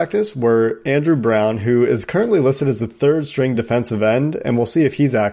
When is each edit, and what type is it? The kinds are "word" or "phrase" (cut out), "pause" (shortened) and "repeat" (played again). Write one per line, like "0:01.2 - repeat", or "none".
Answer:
none